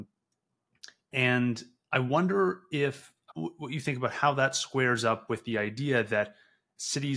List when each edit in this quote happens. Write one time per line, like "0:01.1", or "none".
0:03.3